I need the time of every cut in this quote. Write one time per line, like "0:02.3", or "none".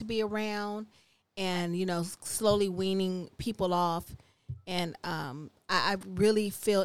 none